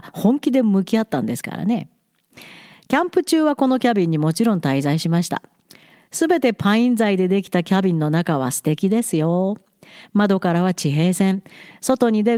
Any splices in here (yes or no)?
no